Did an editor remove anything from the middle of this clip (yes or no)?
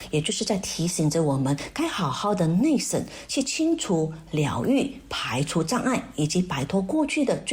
no